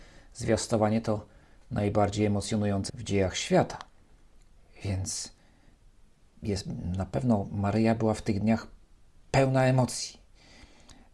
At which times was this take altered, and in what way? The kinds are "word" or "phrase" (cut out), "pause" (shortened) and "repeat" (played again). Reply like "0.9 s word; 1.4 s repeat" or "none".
2.9 s word